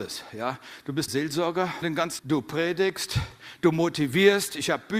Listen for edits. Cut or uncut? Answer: cut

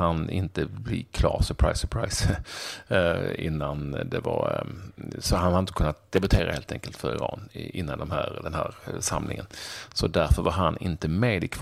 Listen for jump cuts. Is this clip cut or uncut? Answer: uncut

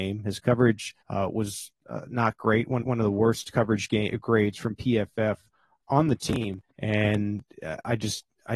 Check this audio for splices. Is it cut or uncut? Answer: cut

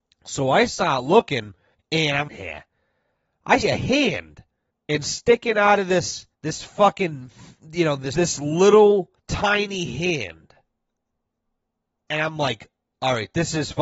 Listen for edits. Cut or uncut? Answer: cut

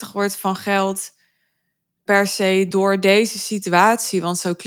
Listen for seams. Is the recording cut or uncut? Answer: uncut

